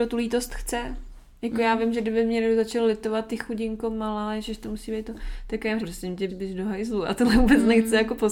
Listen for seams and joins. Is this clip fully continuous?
no; 2 cuts; at 5.8 s, 6.3 s

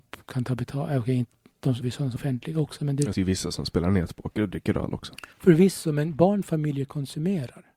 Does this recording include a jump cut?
yes; 4 cuts; at 1.8 s, 2.2 s, 3.1 s, 5.3 s

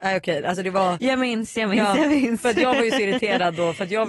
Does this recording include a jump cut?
no; 0 cuts

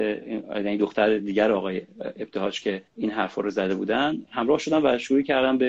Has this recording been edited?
yes; 1 cut; at 2.9 s

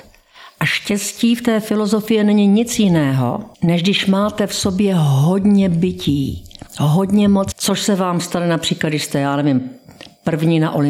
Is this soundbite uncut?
no; 3 cuts; at 3.5 s, 6.7 s, 7.5 s

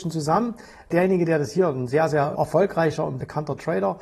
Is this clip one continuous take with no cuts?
yes; 0 cuts

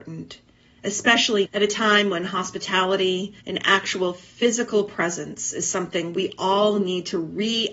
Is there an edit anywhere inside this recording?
yes; 2 cuts; at 1.5 s, 3.4 s

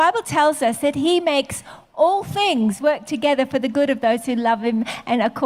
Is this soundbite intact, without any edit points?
yes; 0 cuts

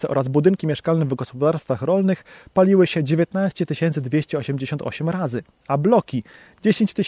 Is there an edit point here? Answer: no; 0 cuts

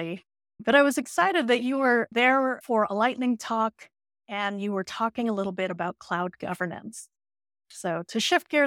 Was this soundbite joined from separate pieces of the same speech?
no; 0 cuts

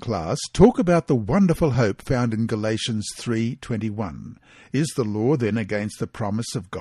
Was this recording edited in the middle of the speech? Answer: no; 0 cuts

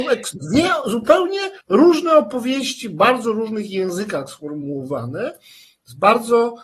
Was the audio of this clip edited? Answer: yes; 1 cut; at 1.6 s

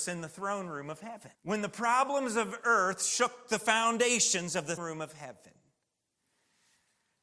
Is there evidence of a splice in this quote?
yes; 2 cuts; at 1.3 s, 4.8 s

